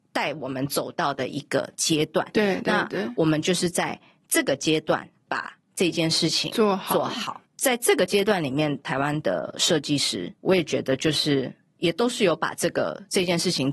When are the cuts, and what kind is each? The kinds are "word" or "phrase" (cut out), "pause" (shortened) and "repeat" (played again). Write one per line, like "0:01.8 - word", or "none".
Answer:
none